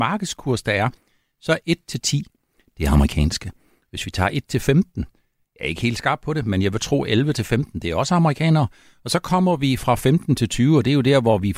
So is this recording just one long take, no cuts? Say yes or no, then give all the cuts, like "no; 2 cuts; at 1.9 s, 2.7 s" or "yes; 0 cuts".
yes; 0 cuts